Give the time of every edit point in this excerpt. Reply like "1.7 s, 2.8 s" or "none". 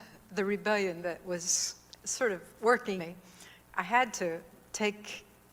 2.0 s, 3.0 s